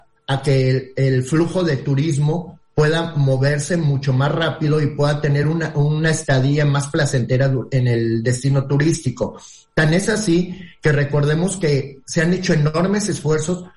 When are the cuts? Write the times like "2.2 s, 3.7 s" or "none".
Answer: none